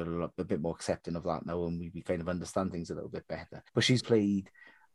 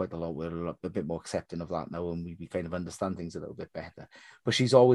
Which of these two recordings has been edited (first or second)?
first